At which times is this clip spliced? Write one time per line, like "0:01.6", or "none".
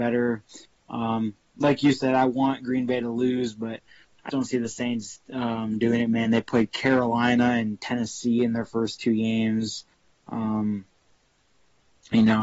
0:04.3